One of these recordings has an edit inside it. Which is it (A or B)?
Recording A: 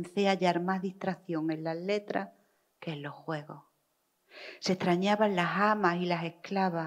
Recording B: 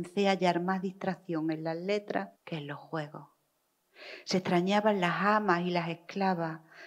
B